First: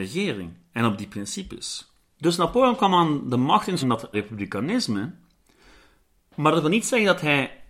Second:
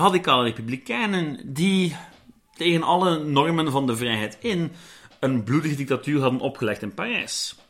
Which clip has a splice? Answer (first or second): first